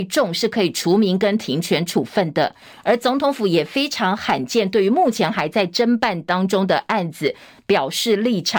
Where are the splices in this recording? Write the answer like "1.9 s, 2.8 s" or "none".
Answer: none